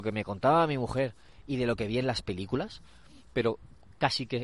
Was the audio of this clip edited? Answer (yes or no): no